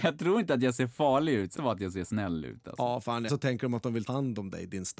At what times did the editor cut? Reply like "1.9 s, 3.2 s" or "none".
1.6 s, 3.3 s, 4.1 s